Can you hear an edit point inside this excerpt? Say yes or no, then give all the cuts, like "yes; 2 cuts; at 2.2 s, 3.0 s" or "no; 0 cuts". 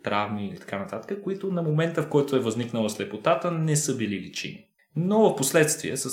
yes; 1 cut; at 4.8 s